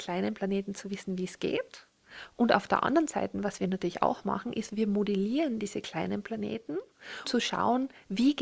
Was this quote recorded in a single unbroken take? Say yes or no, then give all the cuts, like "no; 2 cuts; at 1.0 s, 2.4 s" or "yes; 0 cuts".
no; 1 cut; at 7.2 s